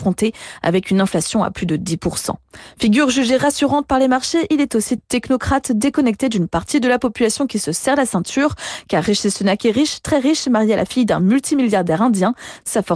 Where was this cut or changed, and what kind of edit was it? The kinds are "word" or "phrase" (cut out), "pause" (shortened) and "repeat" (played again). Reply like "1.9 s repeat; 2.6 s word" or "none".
5.0 s phrase